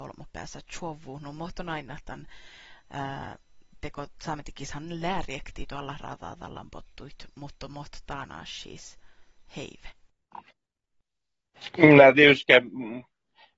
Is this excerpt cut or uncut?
uncut